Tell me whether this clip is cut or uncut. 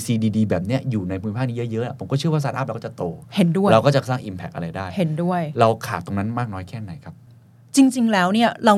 uncut